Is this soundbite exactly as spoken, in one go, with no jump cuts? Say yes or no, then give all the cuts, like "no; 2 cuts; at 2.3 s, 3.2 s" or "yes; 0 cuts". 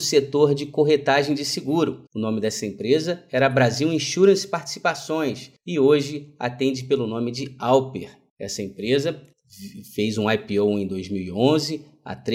no; 1 cut; at 2.1 s